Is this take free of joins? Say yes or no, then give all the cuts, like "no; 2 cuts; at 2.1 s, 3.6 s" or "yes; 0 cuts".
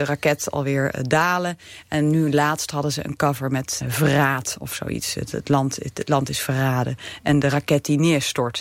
no; 1 cut; at 3.8 s